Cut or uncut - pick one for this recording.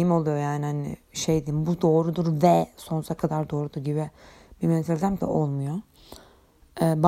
cut